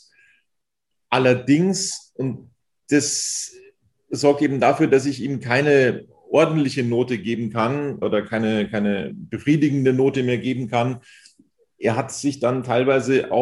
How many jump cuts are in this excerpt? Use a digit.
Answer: 1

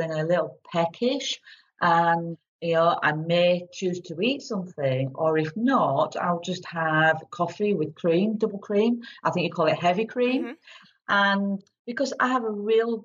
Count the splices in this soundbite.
0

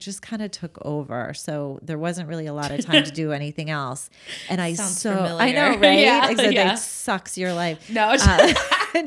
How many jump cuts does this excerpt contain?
0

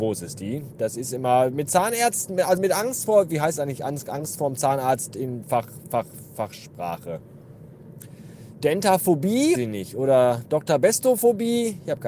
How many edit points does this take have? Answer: 2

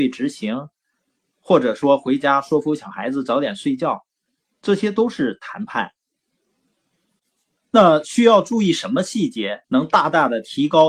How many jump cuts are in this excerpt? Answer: 1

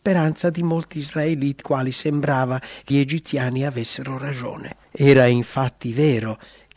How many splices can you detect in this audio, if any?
3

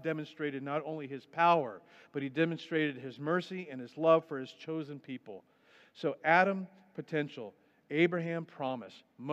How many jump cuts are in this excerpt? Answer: 0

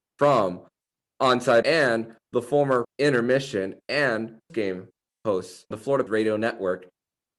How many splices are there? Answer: 5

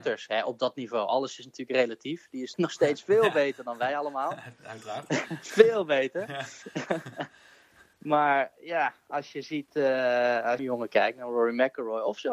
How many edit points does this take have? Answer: 2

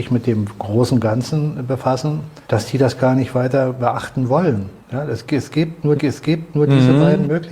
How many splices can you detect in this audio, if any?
3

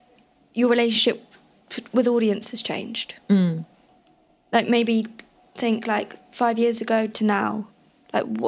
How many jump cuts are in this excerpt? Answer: 0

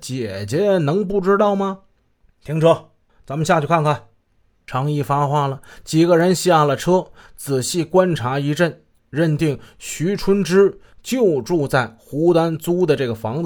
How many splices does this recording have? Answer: 0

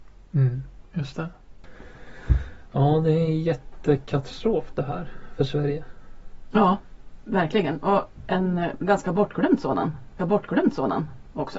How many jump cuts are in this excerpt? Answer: 1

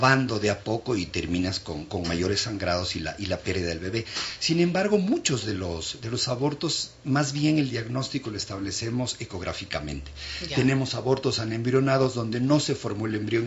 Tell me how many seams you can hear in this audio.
0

